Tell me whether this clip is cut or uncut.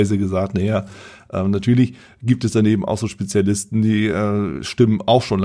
uncut